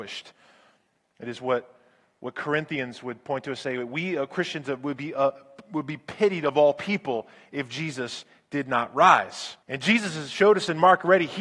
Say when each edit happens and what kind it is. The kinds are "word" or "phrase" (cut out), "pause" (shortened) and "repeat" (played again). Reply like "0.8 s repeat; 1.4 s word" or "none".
9.6 s pause